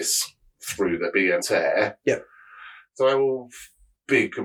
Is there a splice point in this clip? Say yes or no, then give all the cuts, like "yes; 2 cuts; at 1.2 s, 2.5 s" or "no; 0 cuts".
yes; 1 cut; at 1.4 s